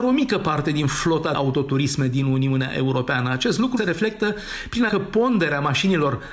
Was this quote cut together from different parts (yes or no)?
yes